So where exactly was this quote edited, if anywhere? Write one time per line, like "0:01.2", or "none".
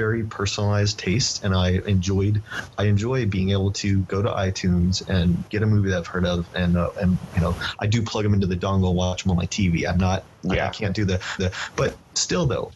0:05.5
0:11.4